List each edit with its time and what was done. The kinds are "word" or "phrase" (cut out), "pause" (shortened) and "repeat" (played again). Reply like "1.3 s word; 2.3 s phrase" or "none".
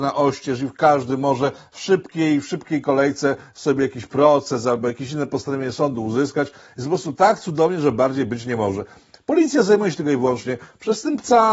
none